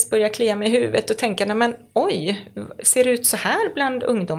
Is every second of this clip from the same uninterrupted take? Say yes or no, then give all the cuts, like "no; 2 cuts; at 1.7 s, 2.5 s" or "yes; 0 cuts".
yes; 0 cuts